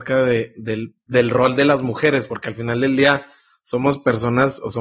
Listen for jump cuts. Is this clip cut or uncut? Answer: uncut